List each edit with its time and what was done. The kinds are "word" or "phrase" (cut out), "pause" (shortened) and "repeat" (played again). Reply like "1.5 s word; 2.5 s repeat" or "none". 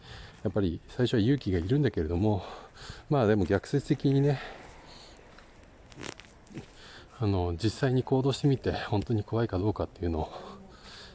7.1 s pause